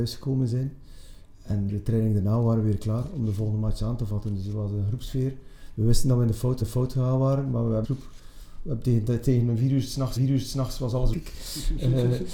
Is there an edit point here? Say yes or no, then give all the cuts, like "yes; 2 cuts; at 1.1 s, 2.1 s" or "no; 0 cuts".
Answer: yes; 5 cuts; at 1.7 s, 6.6 s, 7.8 s, 10.2 s, 11.1 s